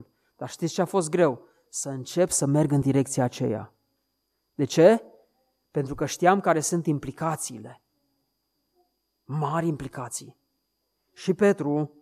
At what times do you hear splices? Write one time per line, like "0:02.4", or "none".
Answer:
none